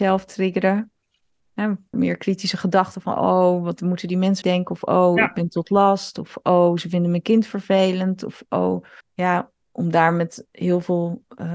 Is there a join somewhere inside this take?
yes; 3 cuts; at 1.9 s, 4.4 s, 9.0 s

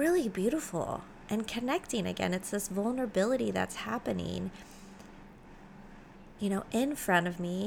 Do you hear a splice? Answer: no; 0 cuts

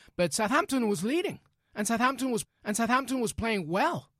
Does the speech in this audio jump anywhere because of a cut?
yes; 1 cut; at 2.4 s

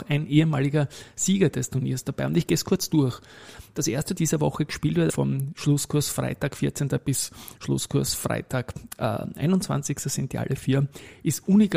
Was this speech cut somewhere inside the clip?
yes; 2 cuts; at 4.2 s, 5.1 s

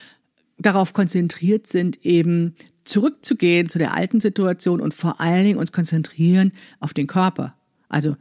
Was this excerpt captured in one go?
yes; 0 cuts

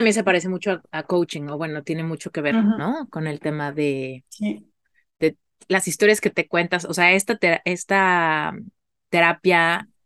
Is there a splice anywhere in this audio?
no; 0 cuts

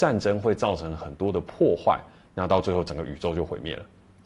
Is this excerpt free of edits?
yes; 0 cuts

